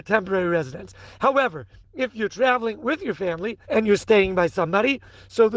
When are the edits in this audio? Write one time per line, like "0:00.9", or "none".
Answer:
0:03.6